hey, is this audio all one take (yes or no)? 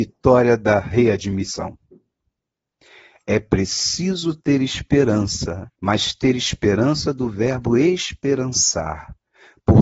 no